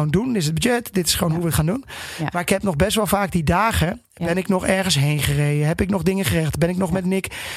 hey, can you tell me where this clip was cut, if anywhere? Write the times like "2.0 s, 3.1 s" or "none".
none